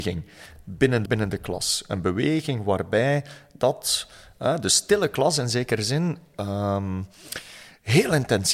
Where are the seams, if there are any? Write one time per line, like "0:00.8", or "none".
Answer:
0:01.1